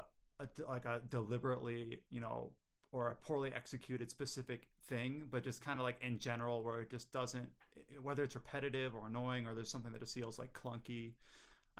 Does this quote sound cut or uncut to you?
uncut